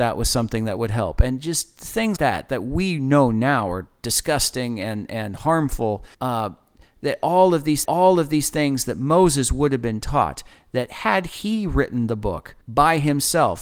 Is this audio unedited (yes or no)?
no